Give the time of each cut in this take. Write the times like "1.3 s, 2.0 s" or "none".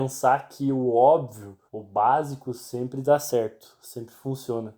1.7 s